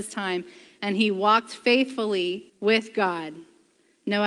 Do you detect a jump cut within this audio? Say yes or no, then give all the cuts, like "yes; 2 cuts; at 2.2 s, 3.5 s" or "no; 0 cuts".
yes; 1 cut; at 2.5 s